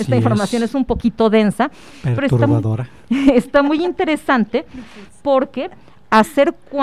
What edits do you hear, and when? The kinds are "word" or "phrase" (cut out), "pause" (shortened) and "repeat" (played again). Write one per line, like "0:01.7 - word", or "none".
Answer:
none